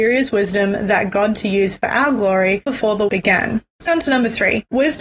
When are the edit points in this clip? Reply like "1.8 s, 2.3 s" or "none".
1.3 s, 2.7 s, 3.1 s, 3.9 s